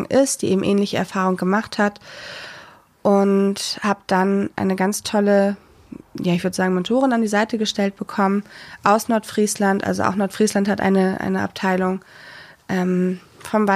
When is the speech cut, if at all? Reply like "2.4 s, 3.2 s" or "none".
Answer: 4.5 s